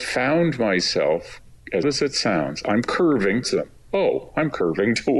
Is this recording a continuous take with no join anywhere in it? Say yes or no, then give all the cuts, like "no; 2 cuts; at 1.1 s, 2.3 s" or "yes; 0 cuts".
no; 2 cuts; at 1.8 s, 3.4 s